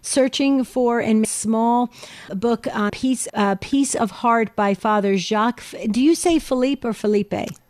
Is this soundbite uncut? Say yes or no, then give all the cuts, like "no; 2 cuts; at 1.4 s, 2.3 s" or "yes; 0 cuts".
no; 4 cuts; at 1.2 s, 2.3 s, 2.9 s, 3.3 s